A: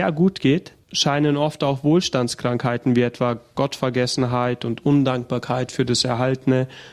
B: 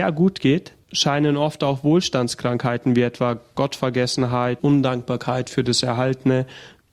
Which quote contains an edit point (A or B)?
B